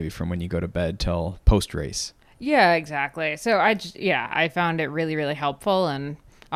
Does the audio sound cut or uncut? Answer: uncut